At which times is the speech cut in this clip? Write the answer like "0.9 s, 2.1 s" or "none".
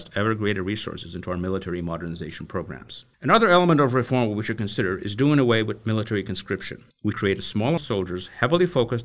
3.1 s, 7.1 s, 7.8 s